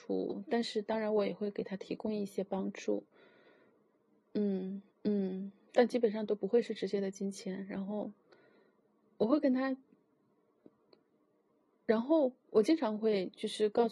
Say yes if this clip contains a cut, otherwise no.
yes